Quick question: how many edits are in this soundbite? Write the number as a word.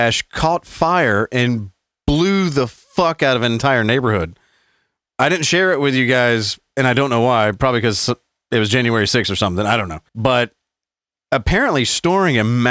one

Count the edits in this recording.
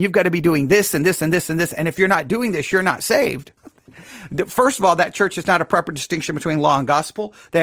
one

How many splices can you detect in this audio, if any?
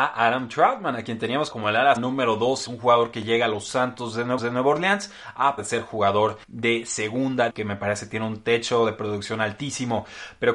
seven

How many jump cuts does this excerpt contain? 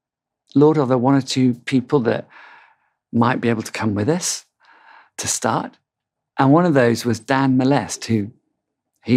zero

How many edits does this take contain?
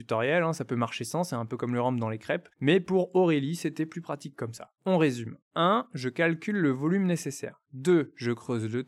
three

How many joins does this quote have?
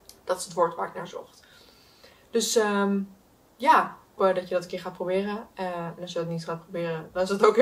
one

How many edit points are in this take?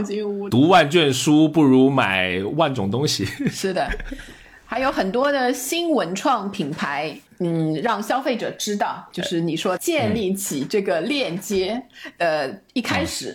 two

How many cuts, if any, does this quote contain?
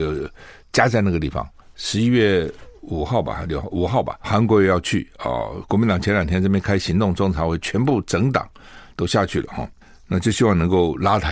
one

